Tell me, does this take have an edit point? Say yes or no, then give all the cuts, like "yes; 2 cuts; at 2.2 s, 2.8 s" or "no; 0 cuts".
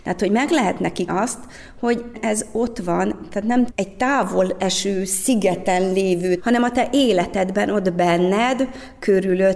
yes; 4 cuts; at 1.1 s, 2.1 s, 3.7 s, 6.4 s